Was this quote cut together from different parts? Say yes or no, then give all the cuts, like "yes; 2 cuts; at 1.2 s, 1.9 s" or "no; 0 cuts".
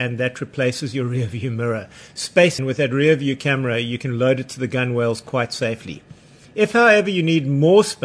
yes; 1 cut; at 2.6 s